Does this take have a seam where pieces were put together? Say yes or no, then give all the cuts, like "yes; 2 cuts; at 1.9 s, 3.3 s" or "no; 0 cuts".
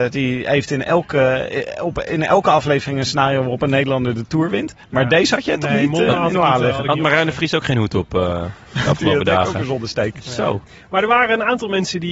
no; 0 cuts